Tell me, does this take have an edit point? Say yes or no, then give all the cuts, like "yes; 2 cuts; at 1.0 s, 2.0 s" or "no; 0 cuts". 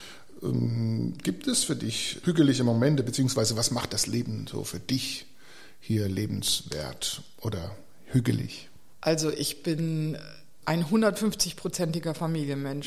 no; 0 cuts